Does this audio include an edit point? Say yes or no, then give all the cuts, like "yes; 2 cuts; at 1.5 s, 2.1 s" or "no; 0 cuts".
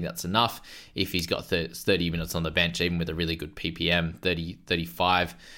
no; 0 cuts